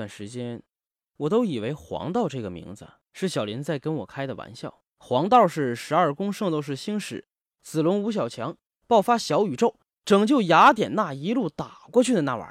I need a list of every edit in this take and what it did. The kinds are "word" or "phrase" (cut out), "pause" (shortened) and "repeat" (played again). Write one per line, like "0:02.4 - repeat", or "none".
0:03.0 - pause
0:04.9 - pause